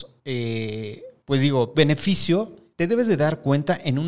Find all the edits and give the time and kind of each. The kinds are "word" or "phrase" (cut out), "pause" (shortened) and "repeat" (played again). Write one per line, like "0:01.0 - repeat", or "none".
0:01.7 - phrase

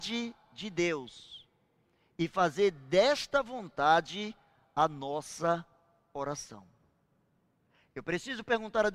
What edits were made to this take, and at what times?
none

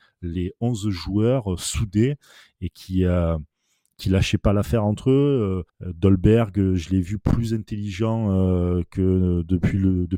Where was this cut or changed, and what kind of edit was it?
0:05.7 - pause

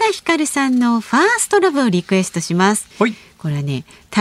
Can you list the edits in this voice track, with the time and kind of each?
0:02.9 - pause

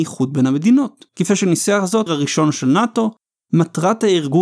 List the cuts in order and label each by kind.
0:01.1 - pause
0:02.1 - word

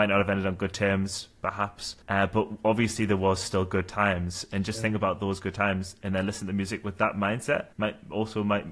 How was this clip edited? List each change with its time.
0:02.0 - pause
0:07.7 - pause

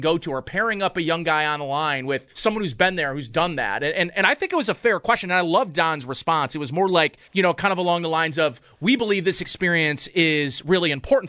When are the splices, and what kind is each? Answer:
0:02.3 - pause
0:07.2 - pause

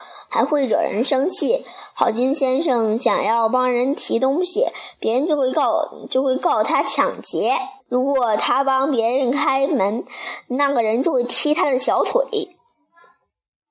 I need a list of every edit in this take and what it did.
0:07.8 - pause

